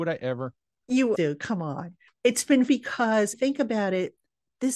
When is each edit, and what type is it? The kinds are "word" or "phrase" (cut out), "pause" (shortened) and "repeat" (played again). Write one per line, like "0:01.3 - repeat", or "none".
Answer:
0:01.1 - word
0:02.1 - pause
0:02.7 - word
0:03.3 - phrase